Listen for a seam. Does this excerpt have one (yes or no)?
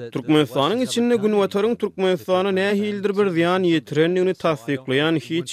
no